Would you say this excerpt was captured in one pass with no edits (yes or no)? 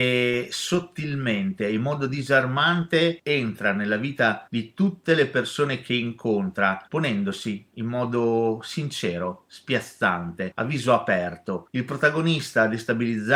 yes